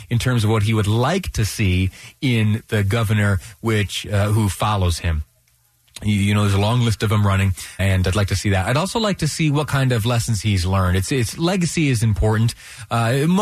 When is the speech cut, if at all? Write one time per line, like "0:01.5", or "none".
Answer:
0:07.8